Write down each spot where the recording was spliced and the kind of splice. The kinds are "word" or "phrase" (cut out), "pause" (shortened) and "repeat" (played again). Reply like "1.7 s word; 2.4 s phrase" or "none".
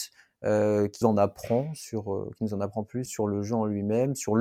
1.0 s word; 3.1 s word